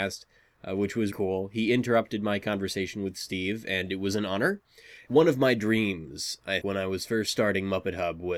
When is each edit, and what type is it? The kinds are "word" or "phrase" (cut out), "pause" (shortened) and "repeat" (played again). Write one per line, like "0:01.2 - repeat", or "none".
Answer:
0:01.1 - word
0:06.6 - word